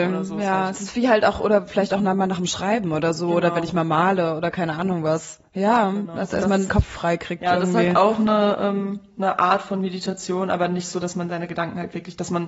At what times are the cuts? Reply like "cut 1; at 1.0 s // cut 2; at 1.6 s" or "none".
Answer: cut 1; at 6.7 s